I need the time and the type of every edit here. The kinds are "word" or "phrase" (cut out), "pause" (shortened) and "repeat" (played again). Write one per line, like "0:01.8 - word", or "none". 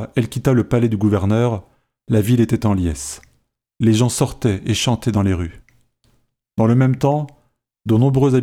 none